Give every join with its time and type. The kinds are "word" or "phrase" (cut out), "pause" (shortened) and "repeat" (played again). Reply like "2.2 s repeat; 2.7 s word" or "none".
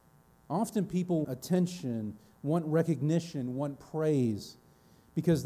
1.2 s word